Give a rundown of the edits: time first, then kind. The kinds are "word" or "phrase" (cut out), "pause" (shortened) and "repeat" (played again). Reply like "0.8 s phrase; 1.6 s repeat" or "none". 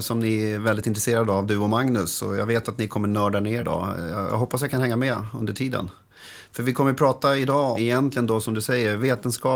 3.6 s word; 7.7 s word